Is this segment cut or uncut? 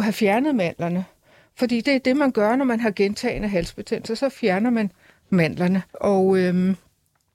cut